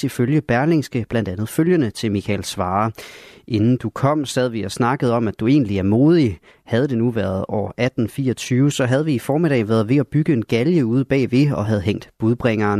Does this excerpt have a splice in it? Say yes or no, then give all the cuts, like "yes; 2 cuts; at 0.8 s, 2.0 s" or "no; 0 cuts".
no; 0 cuts